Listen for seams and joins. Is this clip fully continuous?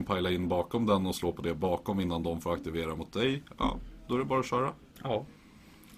yes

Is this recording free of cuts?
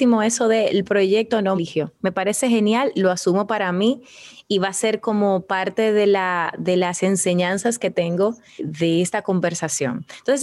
no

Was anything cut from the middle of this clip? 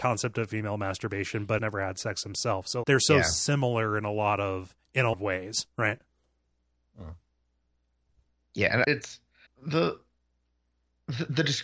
yes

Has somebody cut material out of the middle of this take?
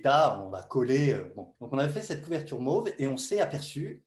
yes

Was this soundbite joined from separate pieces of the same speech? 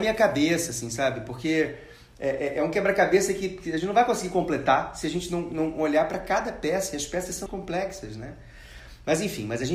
yes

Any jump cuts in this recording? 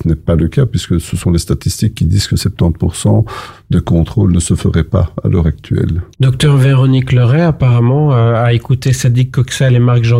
yes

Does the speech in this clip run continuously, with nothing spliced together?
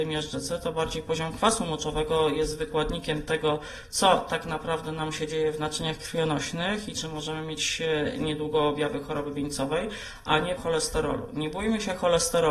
no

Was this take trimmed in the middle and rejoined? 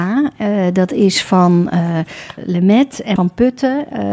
yes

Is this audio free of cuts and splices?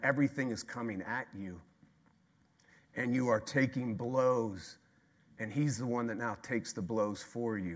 yes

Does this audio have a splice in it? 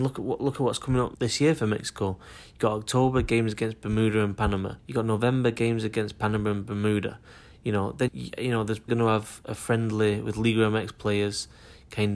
yes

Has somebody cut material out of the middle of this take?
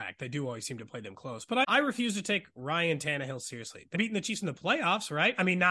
yes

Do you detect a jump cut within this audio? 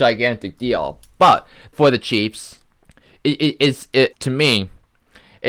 yes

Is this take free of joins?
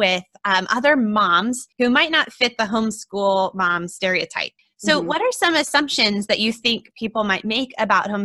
no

